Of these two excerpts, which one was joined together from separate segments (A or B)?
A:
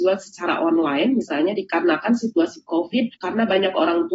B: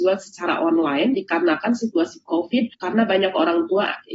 B